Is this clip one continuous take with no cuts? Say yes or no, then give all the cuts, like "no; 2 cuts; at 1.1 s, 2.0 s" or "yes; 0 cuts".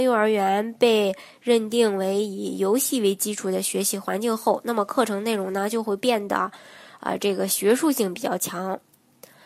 yes; 0 cuts